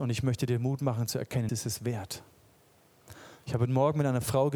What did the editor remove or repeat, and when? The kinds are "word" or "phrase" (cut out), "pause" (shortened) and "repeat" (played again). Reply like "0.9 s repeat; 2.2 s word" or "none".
1.5 s word